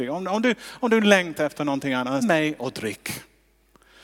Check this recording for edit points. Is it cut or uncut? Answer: cut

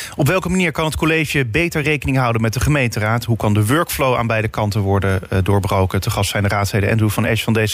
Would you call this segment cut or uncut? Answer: uncut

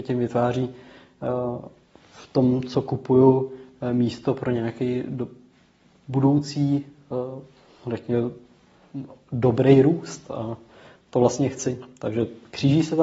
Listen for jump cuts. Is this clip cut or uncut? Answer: uncut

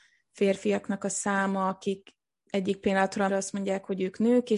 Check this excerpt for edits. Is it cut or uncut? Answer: cut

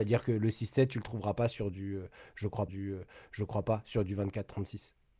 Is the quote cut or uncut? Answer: cut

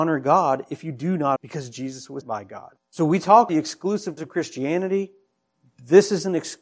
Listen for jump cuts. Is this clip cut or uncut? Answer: cut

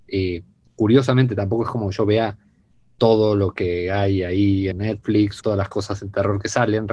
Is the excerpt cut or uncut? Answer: cut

